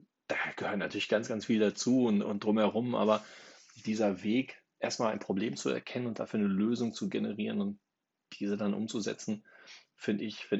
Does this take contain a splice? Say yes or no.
no